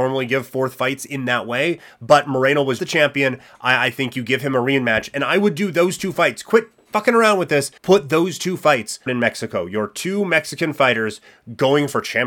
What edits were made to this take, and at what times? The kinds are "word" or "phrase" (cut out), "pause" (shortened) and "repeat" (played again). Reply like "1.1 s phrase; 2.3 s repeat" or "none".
2.8 s word; 7.8 s pause; 9.1 s phrase